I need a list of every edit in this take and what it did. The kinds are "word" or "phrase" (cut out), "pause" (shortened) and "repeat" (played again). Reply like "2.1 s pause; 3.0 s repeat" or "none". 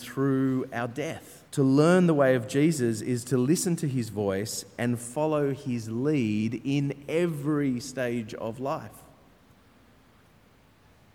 1.5 s pause